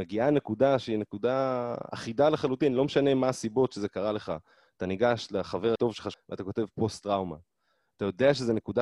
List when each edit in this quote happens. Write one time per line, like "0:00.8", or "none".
0:05.8
0:06.1